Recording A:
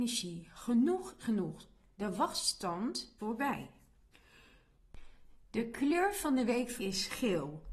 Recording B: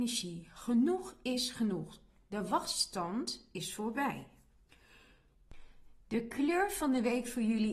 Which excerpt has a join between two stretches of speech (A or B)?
A